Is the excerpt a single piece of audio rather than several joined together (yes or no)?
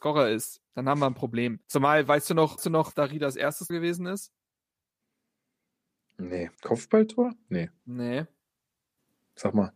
no